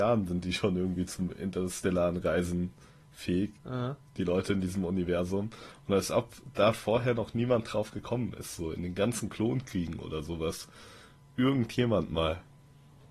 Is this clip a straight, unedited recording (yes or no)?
no